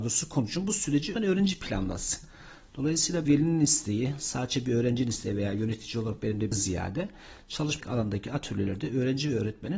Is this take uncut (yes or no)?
no